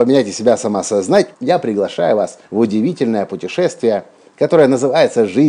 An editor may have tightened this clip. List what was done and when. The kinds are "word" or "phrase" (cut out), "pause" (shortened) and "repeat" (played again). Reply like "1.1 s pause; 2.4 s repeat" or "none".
1.3 s pause; 2.4 s pause